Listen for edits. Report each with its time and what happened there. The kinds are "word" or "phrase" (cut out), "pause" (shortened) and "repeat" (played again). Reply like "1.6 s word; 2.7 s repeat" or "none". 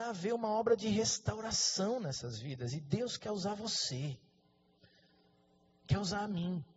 none